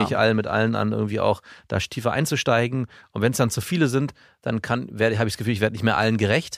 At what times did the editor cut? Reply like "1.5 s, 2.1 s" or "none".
none